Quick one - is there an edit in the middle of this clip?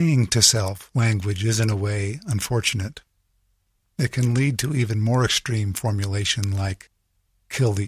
no; 0 cuts

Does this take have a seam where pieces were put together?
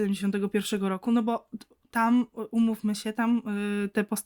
no; 0 cuts

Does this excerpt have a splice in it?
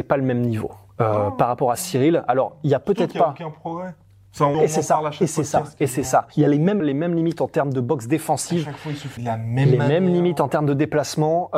yes; 4 cuts; at 4.5 s, 6.3 s, 6.8 s, 9.2 s

